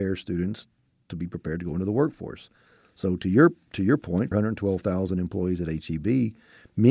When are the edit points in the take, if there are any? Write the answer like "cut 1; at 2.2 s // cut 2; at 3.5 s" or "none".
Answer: cut 1; at 4.3 s